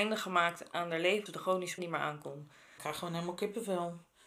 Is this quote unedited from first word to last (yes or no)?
no